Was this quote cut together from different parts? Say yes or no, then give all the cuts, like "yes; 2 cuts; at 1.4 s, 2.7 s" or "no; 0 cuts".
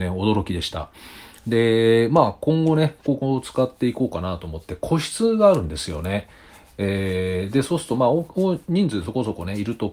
no; 0 cuts